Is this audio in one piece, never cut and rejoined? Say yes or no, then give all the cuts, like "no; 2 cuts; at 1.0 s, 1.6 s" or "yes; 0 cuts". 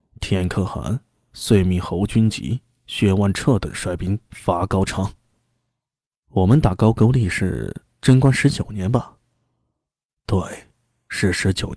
yes; 0 cuts